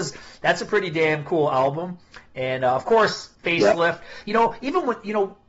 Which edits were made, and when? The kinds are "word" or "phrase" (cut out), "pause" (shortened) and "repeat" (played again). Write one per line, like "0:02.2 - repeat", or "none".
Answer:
0:03.3 - pause